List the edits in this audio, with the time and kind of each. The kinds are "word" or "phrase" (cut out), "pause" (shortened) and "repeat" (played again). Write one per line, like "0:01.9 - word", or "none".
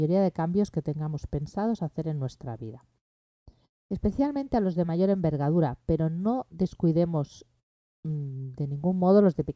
none